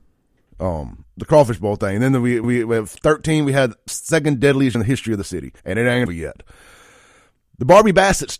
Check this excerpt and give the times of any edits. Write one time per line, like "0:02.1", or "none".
0:01.1
0:02.4
0:03.9
0:04.7
0:05.6
0:06.1